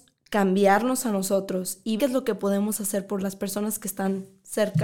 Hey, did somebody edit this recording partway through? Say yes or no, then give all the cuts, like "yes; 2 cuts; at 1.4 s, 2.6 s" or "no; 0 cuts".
yes; 1 cut; at 2.0 s